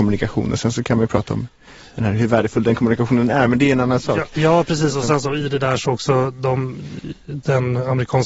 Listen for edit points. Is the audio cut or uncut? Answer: uncut